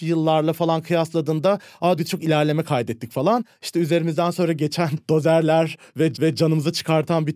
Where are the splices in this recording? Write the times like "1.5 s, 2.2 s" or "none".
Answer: 2.0 s, 6.1 s